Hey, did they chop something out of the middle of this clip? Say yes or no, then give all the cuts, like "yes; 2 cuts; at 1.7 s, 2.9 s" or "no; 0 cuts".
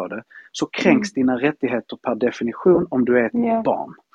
no; 0 cuts